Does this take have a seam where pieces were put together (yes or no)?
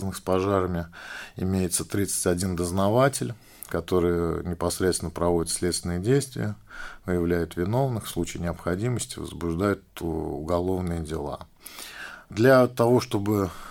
no